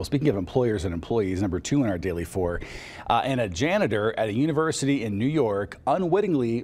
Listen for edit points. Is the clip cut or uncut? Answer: uncut